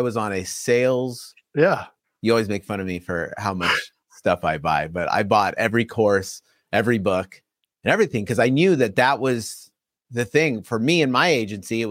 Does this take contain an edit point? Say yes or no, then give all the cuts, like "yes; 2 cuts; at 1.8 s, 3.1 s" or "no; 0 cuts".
no; 0 cuts